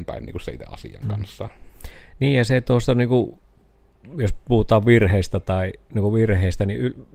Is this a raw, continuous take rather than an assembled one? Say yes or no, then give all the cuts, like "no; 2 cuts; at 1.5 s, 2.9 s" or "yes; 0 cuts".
yes; 0 cuts